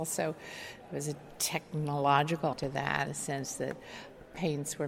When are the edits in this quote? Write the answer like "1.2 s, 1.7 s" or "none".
2.5 s, 3.1 s